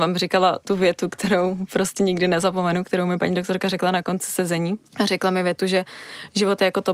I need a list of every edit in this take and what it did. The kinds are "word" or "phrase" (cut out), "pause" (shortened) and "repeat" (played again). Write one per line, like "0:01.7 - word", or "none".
0:04.9 - pause